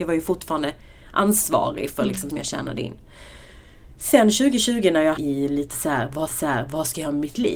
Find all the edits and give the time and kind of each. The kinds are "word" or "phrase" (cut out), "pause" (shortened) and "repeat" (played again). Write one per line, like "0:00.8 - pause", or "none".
0:02.3 - phrase
0:04.0 - pause
0:05.2 - word
0:06.3 - repeat